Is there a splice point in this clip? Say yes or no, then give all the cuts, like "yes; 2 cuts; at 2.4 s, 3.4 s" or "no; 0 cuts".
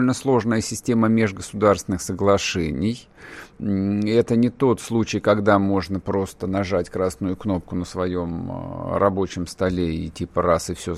no; 0 cuts